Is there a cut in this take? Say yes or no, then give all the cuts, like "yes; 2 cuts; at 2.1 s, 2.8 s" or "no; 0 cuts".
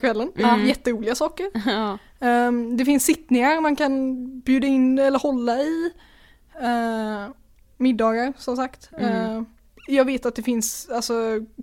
no; 0 cuts